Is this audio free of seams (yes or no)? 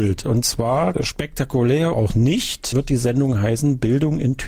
no